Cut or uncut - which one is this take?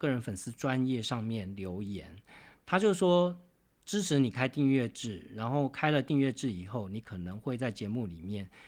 uncut